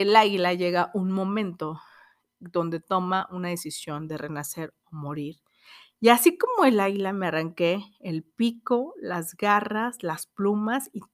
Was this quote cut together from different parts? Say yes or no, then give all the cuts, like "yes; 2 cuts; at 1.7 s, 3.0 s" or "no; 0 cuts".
no; 0 cuts